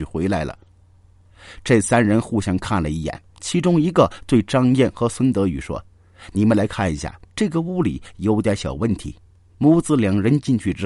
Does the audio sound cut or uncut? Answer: uncut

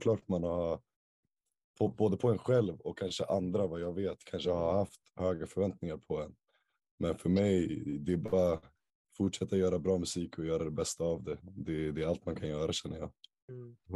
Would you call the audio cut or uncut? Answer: uncut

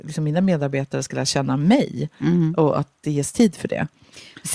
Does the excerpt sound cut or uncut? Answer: uncut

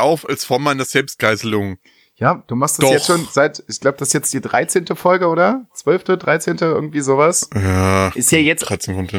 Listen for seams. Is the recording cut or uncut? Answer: uncut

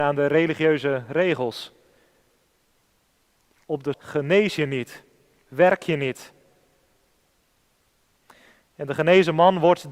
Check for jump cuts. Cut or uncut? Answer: cut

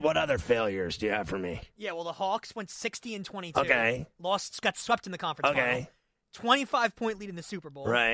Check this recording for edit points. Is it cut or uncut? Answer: uncut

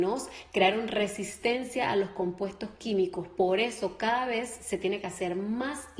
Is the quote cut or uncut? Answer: uncut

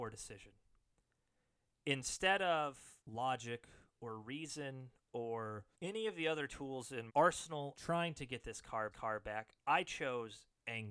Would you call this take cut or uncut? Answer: cut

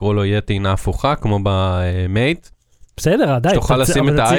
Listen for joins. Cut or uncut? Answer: uncut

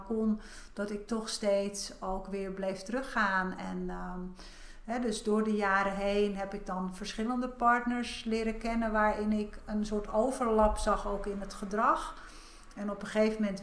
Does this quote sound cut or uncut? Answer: uncut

